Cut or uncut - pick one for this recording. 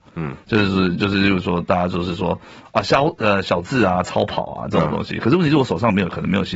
uncut